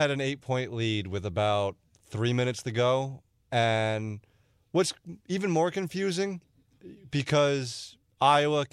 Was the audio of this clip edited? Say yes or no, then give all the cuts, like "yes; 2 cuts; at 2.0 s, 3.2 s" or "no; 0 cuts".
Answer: no; 0 cuts